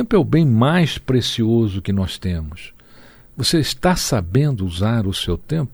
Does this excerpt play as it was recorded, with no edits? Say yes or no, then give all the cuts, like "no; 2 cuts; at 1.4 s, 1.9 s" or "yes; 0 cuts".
yes; 0 cuts